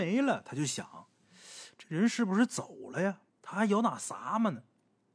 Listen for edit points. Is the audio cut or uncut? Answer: cut